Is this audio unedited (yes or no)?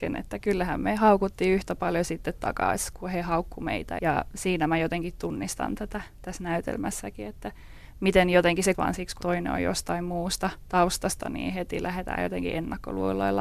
no